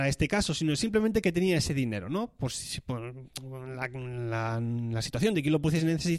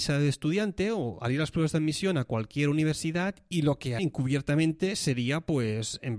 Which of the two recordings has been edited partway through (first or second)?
second